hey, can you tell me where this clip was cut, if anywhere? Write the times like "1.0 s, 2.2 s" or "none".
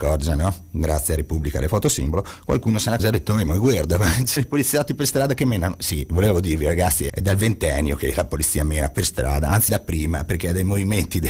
3.0 s, 4.4 s, 7.1 s, 9.7 s